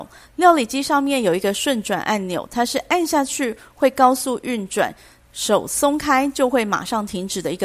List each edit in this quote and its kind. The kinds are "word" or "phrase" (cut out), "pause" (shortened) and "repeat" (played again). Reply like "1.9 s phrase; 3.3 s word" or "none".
none

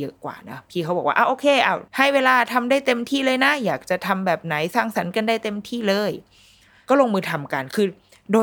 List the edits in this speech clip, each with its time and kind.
1.9 s pause

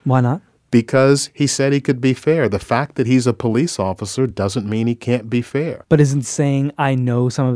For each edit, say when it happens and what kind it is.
none

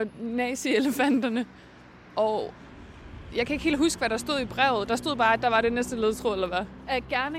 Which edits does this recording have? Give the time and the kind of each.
none

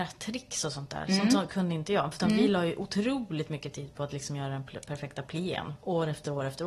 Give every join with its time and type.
none

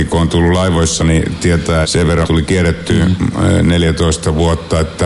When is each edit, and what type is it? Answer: 1.0 s word; 1.8 s word; 2.2 s word

